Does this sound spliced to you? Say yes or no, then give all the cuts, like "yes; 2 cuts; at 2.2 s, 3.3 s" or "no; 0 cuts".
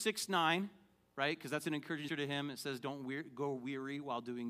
yes; 1 cut; at 2.1 s